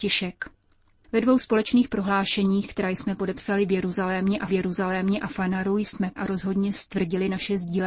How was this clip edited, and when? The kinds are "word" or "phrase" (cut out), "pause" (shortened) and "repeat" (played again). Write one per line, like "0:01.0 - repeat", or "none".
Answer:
0:04.5 - repeat
0:06.2 - word